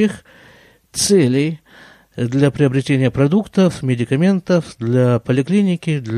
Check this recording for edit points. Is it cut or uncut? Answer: uncut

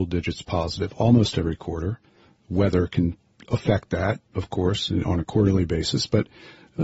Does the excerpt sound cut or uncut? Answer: uncut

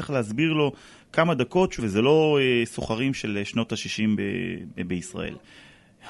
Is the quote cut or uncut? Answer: cut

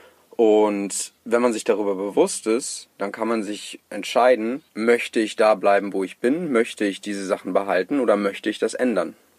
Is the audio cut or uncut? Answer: cut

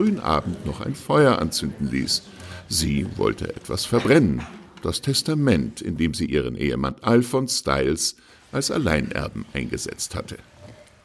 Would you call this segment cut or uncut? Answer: uncut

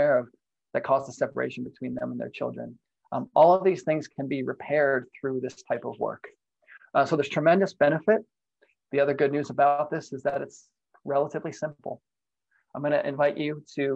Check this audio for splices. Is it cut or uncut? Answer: uncut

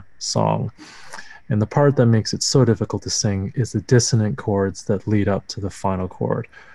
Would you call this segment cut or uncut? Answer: uncut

